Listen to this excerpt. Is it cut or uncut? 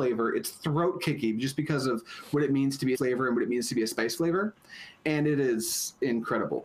cut